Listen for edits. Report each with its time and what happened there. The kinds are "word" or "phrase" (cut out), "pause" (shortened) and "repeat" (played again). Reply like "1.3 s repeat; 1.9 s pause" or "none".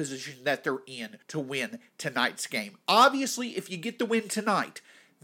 1.2 s pause

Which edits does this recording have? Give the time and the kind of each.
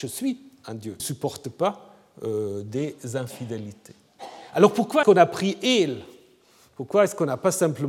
1.0 s phrase; 5.0 s word

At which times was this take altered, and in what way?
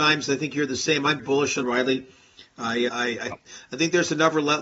1.2 s word; 1.6 s word; 2.9 s word; 3.3 s word

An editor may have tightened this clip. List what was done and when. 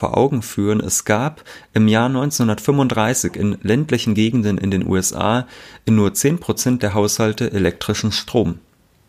none

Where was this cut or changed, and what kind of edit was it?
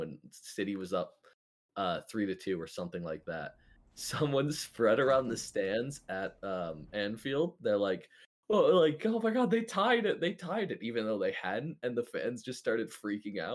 none

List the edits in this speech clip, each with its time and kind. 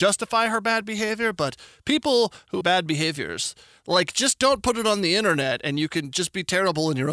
2.6 s word

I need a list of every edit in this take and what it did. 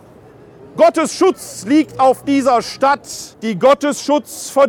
3.3 s pause

